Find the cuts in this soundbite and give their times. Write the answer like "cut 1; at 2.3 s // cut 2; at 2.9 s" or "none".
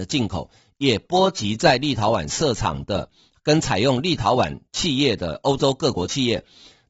none